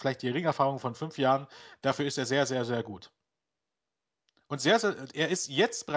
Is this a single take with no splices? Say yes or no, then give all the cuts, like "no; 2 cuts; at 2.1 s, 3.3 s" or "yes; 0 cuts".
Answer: yes; 0 cuts